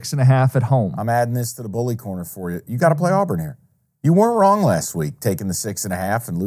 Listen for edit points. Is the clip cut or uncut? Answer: uncut